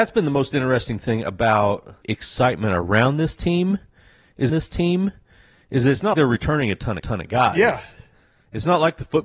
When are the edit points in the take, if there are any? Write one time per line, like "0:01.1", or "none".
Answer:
0:02.0
0:04.5
0:06.1
0:07.0